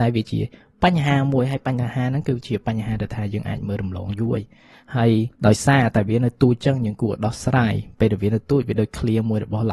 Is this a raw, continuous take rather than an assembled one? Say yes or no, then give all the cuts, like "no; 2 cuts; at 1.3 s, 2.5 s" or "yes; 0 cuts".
no; 1 cut; at 5.4 s